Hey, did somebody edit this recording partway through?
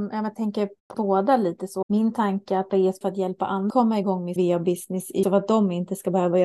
yes; 7 cuts; at 0.9 s, 1.8 s, 2.7 s, 3.0 s, 3.7 s, 4.4 s, 5.2 s

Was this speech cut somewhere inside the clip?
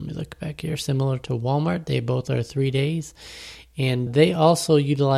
yes; 1 cut; at 4.1 s

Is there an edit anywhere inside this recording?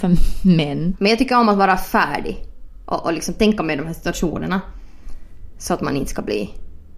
no; 0 cuts

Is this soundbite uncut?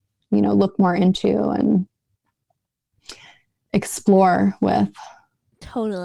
yes; 0 cuts

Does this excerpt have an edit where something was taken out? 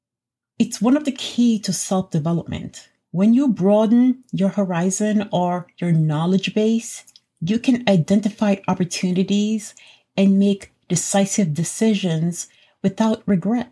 no; 0 cuts

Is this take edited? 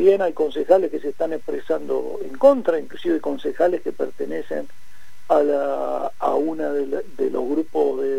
no; 0 cuts

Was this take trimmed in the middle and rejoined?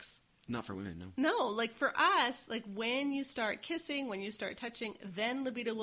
no; 0 cuts

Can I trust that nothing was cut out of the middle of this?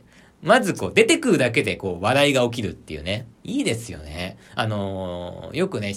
no; 1 cut; at 3.3 s

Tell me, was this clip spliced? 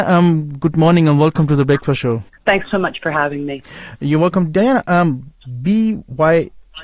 yes; 1 cut; at 2.3 s

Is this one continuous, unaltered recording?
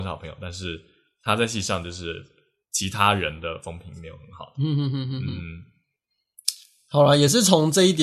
yes; 0 cuts

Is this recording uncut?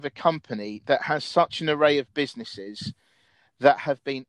yes; 0 cuts

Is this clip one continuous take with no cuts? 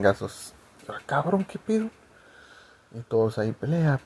yes; 0 cuts

